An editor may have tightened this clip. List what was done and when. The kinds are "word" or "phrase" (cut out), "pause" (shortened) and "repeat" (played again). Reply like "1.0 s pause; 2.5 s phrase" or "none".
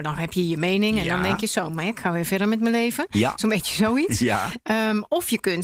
none